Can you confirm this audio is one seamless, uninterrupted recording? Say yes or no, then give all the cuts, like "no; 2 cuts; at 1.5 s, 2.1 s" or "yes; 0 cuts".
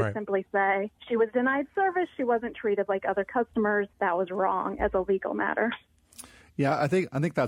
no; 2 cuts; at 1.0 s, 3.9 s